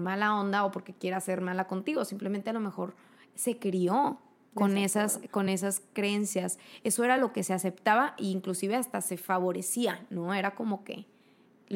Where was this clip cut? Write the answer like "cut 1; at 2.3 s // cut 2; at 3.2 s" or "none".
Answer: none